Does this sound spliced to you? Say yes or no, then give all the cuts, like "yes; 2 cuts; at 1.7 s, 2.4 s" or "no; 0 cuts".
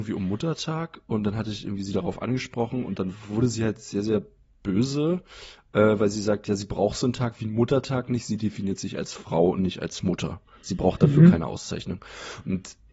no; 0 cuts